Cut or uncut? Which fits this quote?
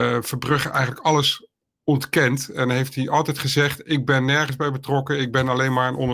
uncut